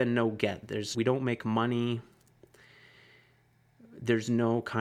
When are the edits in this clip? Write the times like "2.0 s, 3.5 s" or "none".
0.9 s